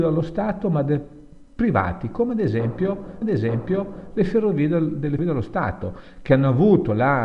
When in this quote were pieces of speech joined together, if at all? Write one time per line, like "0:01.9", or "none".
0:01.5
0:03.2
0:05.2